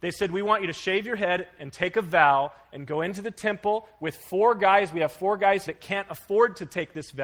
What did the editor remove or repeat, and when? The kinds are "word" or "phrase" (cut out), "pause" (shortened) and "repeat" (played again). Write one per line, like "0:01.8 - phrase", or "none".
0:05.7 - word